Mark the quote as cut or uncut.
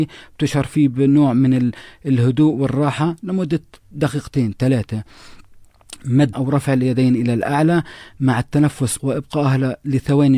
cut